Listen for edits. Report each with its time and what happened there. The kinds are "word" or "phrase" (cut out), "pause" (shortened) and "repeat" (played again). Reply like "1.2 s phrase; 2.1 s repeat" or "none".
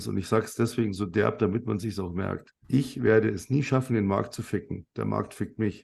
2.6 s pause